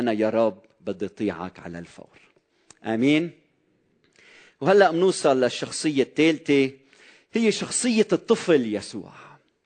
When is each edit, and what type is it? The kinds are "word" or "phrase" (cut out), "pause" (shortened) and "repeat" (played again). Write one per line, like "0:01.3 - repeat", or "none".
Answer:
none